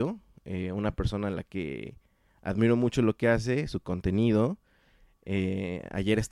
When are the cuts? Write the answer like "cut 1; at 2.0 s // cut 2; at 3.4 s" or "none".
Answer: none